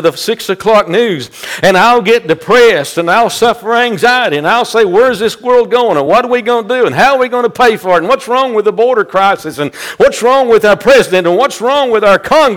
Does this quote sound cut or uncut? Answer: uncut